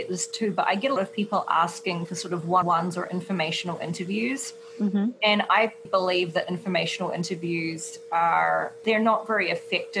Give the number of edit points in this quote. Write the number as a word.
four